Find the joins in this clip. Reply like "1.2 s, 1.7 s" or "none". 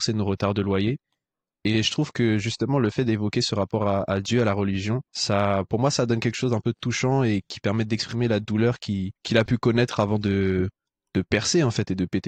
5.1 s, 9.2 s